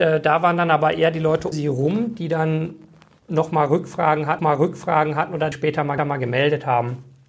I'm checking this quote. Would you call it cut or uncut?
cut